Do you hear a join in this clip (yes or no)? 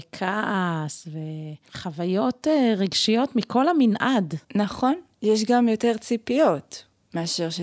yes